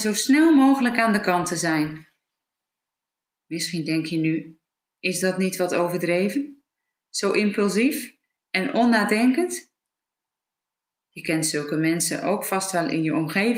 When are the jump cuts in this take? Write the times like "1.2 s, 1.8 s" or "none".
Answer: none